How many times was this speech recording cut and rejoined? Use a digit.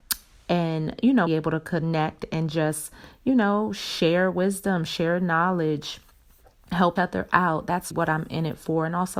3